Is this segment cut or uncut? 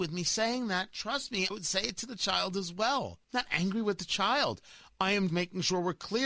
cut